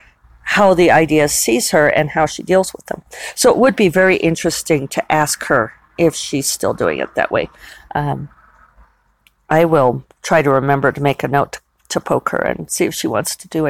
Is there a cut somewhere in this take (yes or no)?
no